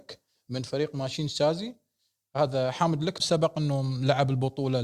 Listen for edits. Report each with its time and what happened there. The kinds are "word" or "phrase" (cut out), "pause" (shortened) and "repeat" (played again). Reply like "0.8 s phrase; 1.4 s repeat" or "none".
3.2 s word